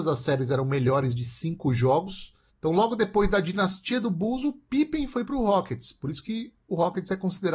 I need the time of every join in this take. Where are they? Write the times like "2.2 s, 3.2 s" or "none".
2.5 s